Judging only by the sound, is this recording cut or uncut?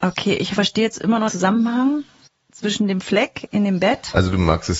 cut